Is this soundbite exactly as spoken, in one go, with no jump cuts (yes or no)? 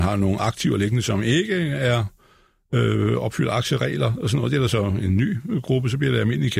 yes